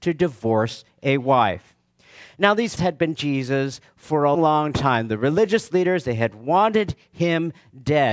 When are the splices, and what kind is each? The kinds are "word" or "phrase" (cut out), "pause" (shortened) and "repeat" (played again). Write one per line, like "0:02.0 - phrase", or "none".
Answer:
0:02.8 - word
0:03.2 - word
0:04.3 - word